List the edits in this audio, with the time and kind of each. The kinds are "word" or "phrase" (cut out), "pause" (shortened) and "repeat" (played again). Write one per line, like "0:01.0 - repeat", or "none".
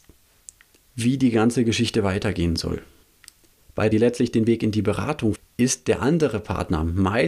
0:03.9 - phrase
0:05.4 - word